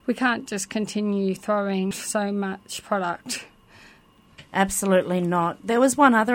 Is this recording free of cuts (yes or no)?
no